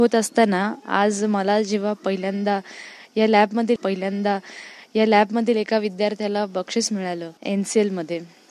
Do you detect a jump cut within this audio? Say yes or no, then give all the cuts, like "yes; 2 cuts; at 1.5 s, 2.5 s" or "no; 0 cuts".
yes; 2 cuts; at 3.8 s, 7.4 s